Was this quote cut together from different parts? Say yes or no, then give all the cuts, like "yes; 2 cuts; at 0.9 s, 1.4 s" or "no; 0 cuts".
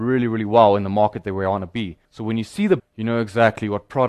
yes; 2 cuts; at 2.0 s, 2.8 s